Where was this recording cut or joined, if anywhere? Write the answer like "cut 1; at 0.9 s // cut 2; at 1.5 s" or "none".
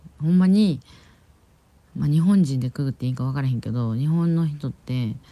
none